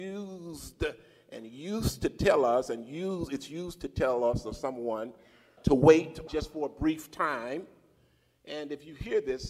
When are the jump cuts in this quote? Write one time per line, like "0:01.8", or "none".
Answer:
0:05.6
0:06.3